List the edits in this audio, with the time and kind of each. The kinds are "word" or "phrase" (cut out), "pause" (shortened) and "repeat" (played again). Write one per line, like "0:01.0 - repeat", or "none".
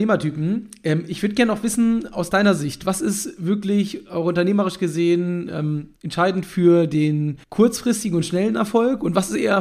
0:06.0 - pause
0:07.4 - pause